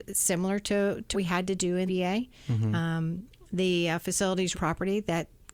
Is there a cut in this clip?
yes; 3 cuts; at 1.1 s, 1.9 s, 4.5 s

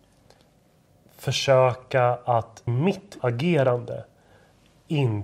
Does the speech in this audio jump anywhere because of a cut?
yes; 2 cuts; at 2.7 s, 3.2 s

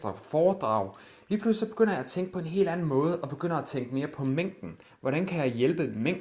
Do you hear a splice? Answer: no; 0 cuts

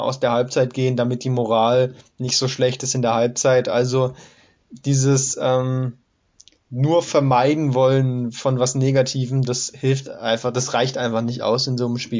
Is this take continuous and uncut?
yes; 0 cuts

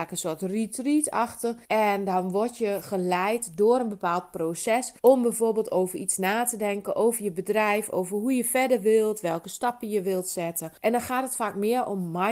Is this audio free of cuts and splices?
no; 3 cuts; at 1.6 s, 5.0 s, 10.8 s

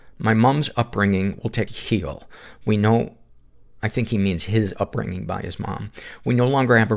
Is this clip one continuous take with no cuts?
no; 1 cut; at 1.7 s

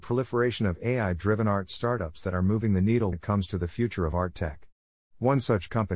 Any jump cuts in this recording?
yes; 1 cut; at 3.1 s

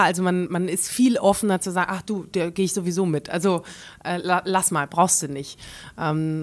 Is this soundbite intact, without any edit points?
yes; 0 cuts

